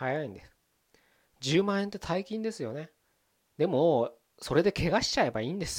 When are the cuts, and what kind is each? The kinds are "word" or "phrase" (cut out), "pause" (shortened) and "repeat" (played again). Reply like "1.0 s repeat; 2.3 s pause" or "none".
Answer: none

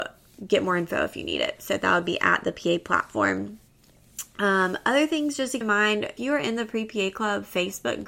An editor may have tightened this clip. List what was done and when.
5.6 s word; 6.2 s word

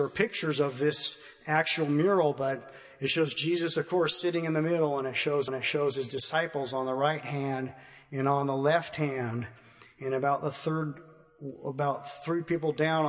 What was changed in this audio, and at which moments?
5.5 s repeat

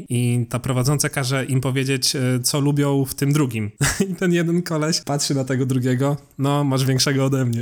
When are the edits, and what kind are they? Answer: 2.4 s word

